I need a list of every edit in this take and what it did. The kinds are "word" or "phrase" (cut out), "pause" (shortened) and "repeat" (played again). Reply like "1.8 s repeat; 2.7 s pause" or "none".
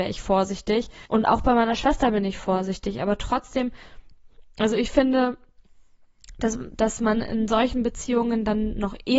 1.1 s pause